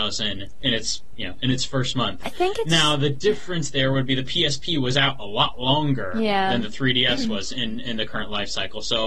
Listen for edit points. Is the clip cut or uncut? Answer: uncut